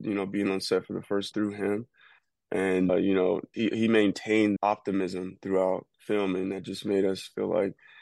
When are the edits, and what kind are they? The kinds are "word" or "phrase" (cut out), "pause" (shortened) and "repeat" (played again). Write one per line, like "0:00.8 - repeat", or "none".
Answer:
0:01.3 - word
0:02.9 - word
0:03.5 - word
0:04.6 - word